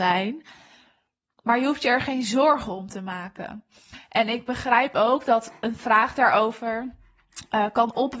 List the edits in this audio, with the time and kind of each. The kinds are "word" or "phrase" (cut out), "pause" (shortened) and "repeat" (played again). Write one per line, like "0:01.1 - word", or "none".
none